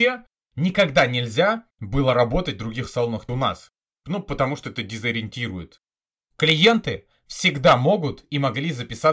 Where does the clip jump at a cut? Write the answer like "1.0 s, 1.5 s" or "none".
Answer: 3.3 s